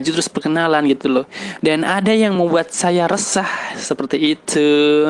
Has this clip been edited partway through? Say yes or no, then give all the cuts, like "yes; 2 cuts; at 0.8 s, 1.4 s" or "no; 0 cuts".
no; 0 cuts